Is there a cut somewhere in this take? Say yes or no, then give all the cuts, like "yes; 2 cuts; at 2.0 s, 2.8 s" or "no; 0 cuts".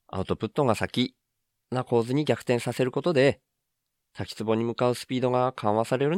no; 0 cuts